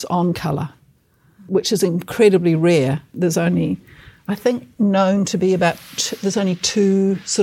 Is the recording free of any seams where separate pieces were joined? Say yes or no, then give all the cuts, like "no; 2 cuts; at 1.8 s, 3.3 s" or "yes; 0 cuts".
yes; 0 cuts